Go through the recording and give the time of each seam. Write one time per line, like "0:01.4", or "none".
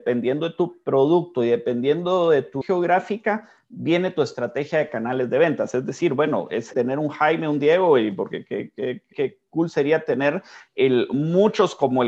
0:02.6
0:06.7
0:09.1